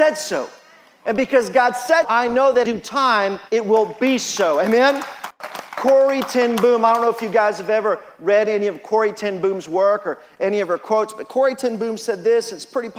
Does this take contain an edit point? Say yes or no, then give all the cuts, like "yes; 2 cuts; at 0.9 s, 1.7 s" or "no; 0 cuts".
yes; 3 cuts; at 2.0 s, 2.6 s, 3.5 s